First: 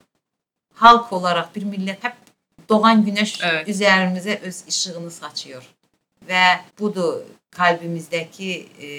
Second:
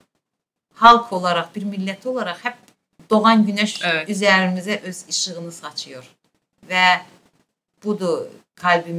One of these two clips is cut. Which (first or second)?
first